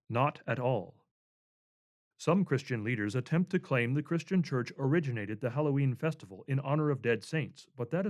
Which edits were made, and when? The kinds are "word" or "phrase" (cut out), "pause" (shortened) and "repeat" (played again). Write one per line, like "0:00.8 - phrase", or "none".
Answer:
none